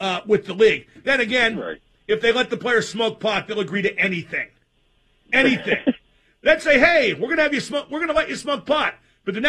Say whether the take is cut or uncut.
uncut